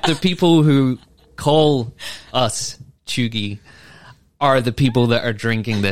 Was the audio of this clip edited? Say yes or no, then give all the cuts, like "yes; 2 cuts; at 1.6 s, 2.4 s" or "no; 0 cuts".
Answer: no; 0 cuts